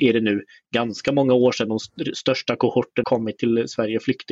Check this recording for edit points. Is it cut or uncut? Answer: cut